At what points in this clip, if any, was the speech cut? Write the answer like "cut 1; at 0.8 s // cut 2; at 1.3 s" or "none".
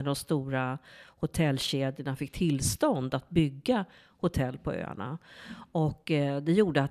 none